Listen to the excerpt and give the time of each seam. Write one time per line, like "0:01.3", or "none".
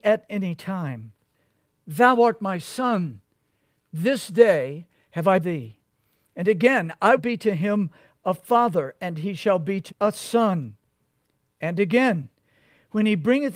0:05.4
0:07.2
0:09.9

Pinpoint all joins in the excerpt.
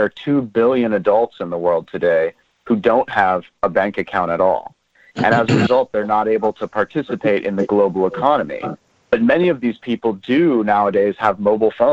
none

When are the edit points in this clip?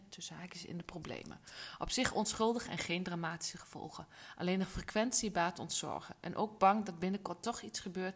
none

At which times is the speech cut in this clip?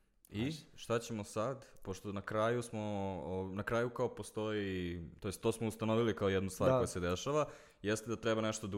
none

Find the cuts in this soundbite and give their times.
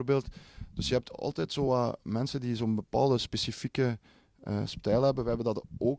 none

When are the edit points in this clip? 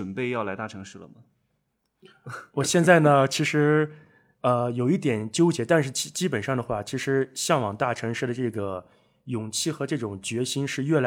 0:02.5

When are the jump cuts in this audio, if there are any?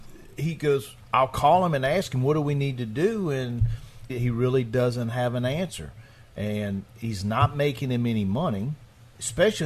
0:04.1

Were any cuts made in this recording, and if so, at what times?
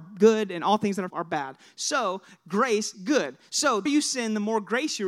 0:01.1
0:02.9
0:03.9

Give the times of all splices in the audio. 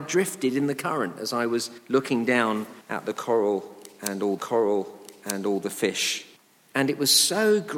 0:01.8
0:02.8
0:04.4
0:06.4

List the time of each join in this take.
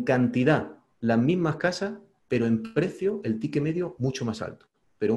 0:00.9

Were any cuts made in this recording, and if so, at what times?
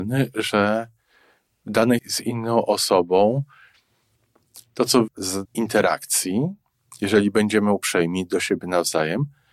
0:02.0
0:05.1
0:05.5

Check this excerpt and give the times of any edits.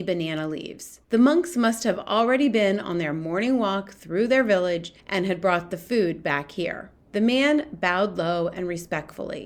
0:01.0
0:05.0
0:07.0

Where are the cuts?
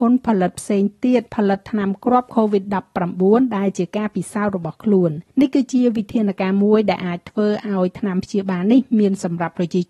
0:01.3
0:05.3

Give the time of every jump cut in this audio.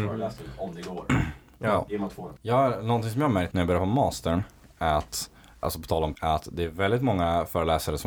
0:02.4
0:03.5
0:05.6
0:06.1

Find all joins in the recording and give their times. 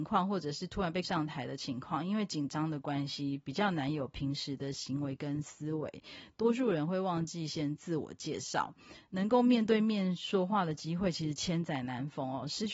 0:01.0

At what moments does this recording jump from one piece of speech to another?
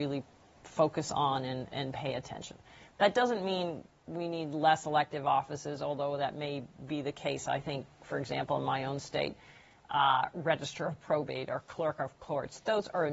0:01.7

